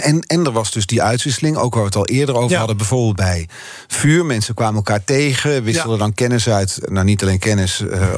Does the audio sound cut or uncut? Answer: uncut